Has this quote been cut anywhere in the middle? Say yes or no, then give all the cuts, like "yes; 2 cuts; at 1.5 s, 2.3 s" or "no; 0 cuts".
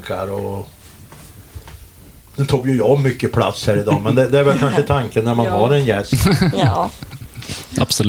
no; 0 cuts